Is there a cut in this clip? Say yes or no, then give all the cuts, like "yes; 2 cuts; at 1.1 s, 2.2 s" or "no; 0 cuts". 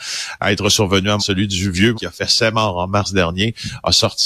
yes; 2 cuts; at 1.2 s, 1.9 s